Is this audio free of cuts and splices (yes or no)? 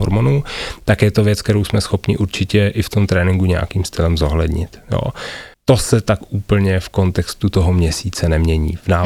yes